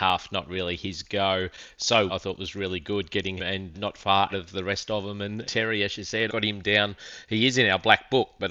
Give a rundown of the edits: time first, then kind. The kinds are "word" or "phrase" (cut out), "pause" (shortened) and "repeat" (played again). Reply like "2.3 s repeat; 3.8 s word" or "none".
2.1 s word; 3.4 s word; 3.7 s word; 4.3 s word; 5.4 s word; 6.3 s word